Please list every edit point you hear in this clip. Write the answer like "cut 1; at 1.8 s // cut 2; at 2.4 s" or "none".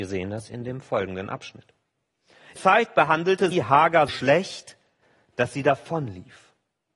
cut 1; at 2.6 s // cut 2; at 3.5 s // cut 3; at 4.1 s